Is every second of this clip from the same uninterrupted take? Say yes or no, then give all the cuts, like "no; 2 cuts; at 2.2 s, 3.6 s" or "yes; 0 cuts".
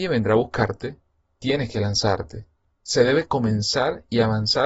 yes; 0 cuts